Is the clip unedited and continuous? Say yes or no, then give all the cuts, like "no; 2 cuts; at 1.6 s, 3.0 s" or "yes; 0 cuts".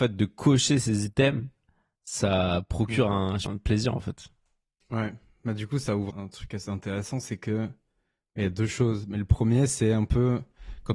no; 2 cuts; at 3.5 s, 6.1 s